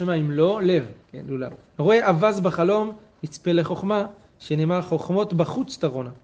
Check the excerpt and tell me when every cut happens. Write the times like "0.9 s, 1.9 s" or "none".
1.0 s, 1.7 s